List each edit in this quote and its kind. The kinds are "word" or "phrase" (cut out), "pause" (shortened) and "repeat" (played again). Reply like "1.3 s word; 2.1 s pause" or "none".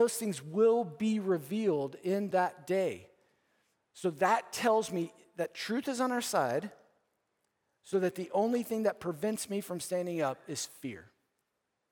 none